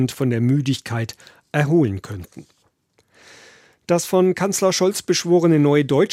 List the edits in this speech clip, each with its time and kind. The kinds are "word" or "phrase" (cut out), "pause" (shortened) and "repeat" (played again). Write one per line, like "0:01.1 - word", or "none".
none